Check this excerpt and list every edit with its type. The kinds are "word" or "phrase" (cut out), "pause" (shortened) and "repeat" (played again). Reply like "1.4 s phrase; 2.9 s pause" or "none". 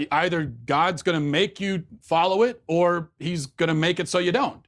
none